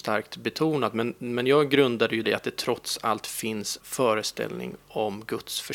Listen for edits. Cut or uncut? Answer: cut